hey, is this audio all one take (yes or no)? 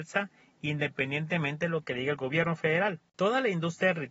yes